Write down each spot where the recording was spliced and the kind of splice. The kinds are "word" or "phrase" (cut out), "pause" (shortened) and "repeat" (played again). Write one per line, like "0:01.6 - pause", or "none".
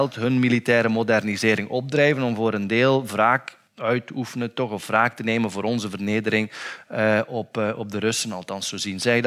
0:03.7 - pause